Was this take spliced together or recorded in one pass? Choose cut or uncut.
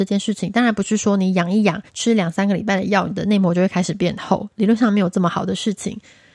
cut